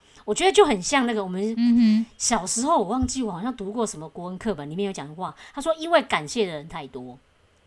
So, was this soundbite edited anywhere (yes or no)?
no